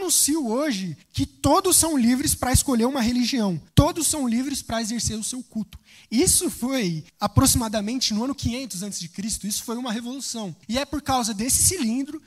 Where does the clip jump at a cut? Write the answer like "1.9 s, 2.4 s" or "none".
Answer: 1.0 s, 3.7 s, 7.1 s, 10.6 s